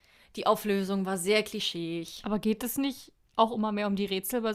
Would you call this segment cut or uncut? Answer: uncut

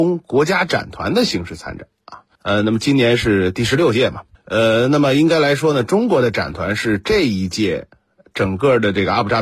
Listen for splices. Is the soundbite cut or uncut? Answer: cut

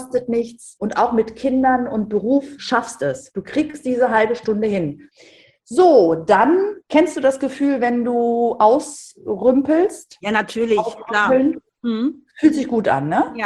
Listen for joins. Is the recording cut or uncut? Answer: cut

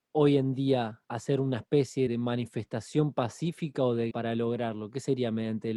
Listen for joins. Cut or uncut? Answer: cut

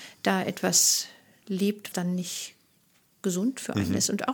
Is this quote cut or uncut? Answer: cut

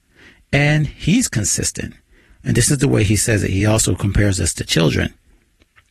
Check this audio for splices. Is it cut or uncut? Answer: uncut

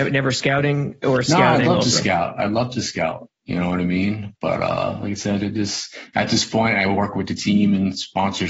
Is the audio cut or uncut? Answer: uncut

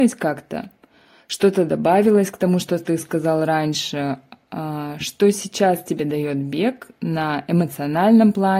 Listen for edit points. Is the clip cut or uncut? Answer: uncut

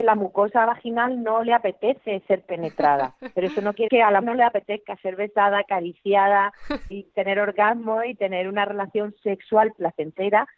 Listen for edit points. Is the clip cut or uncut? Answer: cut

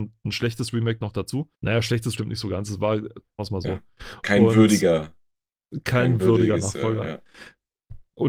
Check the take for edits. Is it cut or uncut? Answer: cut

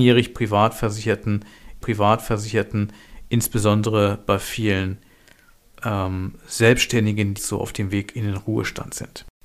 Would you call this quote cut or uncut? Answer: cut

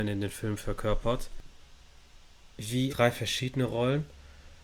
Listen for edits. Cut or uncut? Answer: cut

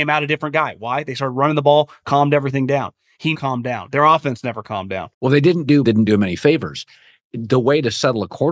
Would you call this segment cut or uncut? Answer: cut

